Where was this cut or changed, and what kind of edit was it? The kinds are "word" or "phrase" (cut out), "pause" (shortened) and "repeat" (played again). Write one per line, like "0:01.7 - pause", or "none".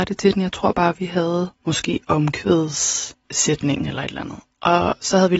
0:01.6 - pause
0:03.2 - pause